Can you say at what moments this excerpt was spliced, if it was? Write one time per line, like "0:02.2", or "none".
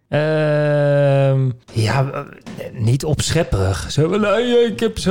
none